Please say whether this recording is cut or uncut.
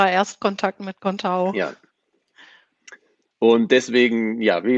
uncut